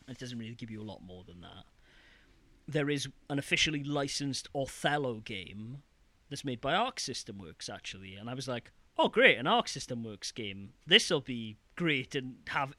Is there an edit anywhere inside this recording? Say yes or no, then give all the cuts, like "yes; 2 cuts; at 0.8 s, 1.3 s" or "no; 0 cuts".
no; 0 cuts